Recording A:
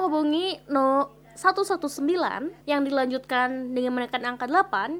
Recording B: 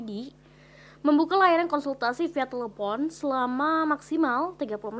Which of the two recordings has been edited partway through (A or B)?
A